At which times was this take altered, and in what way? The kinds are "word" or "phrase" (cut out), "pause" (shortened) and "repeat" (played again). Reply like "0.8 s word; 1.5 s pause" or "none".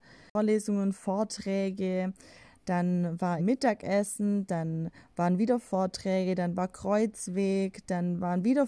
3.4 s word